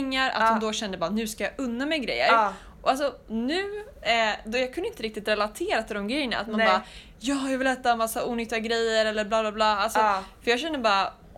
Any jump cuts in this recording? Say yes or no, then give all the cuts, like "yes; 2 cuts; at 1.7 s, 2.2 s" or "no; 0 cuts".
no; 0 cuts